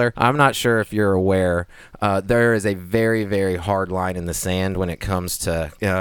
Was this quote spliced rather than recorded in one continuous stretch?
no; 0 cuts

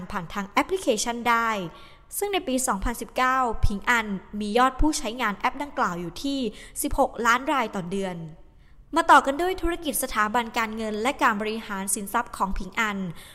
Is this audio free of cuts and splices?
yes; 0 cuts

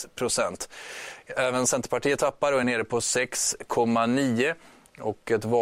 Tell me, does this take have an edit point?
no; 0 cuts

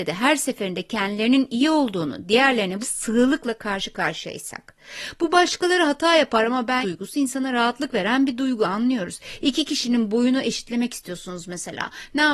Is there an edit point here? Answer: yes; 2 cuts; at 2.8 s, 6.8 s

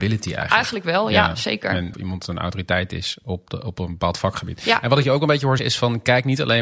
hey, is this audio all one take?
no; 2 cuts; at 1.9 s, 5.6 s

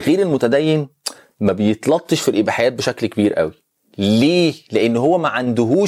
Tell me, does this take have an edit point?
no; 0 cuts

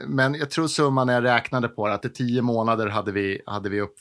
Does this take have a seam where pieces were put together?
yes; 1 cut; at 2.0 s

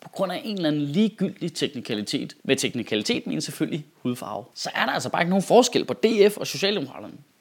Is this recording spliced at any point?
no; 0 cuts

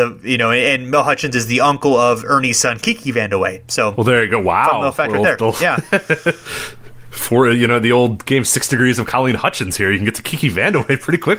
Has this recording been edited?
no; 0 cuts

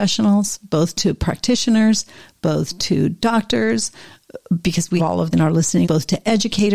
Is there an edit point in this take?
yes; 3 cuts; at 5.0 s, 5.3 s, 5.8 s

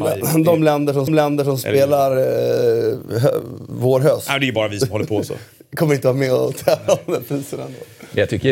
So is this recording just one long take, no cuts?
no; 1 cut; at 1.1 s

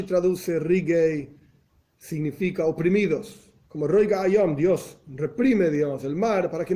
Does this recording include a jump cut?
no; 0 cuts

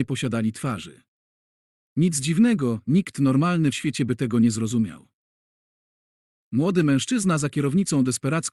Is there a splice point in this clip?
yes; 1 cut; at 3.7 s

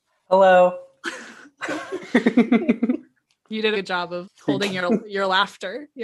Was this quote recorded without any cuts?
no; 2 cuts; at 3.7 s, 4.2 s

